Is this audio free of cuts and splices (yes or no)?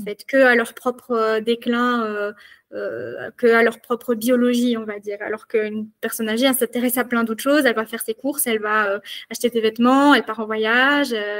yes